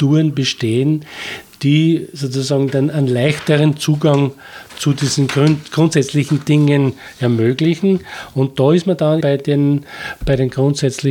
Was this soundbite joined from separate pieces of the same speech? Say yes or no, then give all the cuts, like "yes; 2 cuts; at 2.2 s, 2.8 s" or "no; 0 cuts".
yes; 1 cut; at 9.2 s